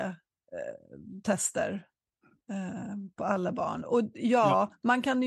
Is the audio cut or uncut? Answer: uncut